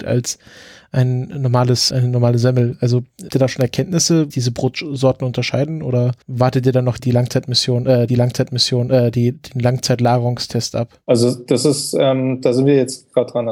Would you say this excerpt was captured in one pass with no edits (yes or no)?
no